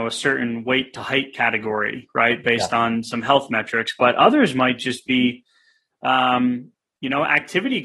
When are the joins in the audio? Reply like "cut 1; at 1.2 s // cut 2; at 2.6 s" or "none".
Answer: none